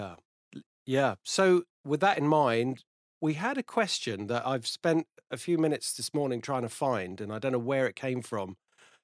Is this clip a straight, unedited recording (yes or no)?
yes